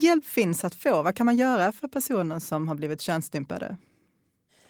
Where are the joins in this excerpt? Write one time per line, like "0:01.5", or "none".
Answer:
none